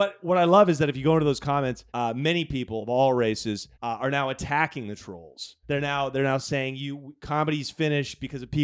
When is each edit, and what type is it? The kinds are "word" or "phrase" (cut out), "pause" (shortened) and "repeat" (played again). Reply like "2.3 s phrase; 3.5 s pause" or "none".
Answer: 1.9 s pause; 3.7 s pause; 5.6 s pause

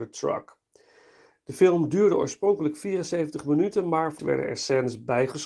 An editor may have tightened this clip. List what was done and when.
4.2 s phrase

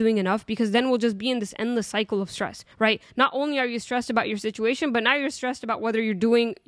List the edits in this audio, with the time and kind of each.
2.7 s pause

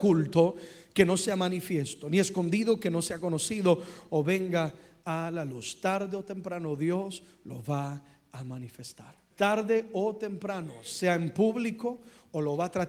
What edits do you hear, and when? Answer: 9.3 s pause

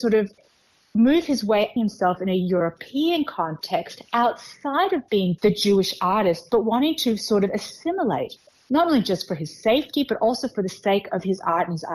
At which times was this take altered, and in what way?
1.8 s phrase; 5.4 s word

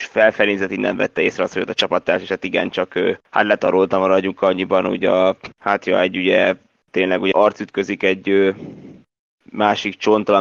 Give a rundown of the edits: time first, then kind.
3.2 s pause; 5.5 s pause; 7.3 s word

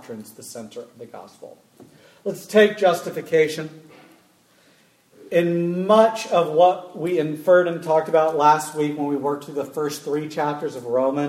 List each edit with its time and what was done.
none

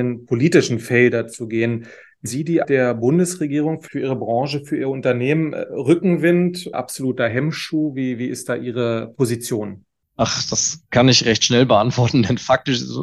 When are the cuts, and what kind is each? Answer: 2.3 s word; 2.6 s word; 3.9 s word; 6.7 s word

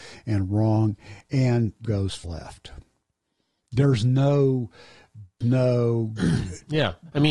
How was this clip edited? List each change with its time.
1.8 s word; 2.2 s word; 5.4 s word

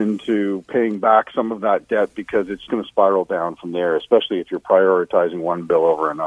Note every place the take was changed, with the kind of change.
2.7 s word

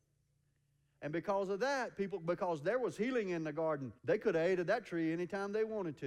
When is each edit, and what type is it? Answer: 4.0 s pause

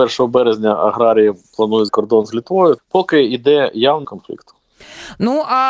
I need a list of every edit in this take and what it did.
1.9 s word; 2.8 s word; 4.0 s word

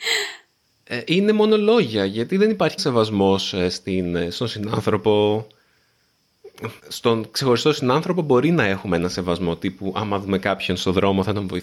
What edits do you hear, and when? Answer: 2.8 s word; 6.8 s pause

